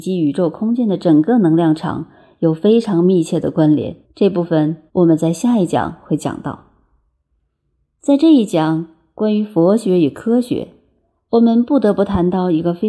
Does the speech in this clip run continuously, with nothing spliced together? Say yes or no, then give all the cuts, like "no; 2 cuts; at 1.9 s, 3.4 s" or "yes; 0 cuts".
no; 2 cuts; at 4.0 s, 4.9 s